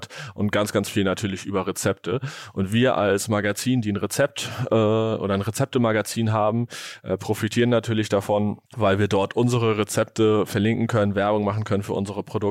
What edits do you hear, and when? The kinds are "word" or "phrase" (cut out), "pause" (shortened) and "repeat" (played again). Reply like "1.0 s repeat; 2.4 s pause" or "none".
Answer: 8.7 s pause